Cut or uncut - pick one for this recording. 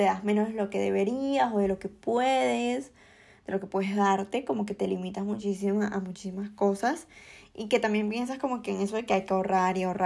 uncut